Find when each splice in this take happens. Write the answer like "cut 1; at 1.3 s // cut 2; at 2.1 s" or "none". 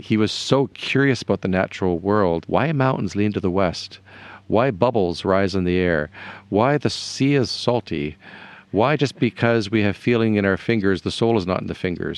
cut 1; at 2.4 s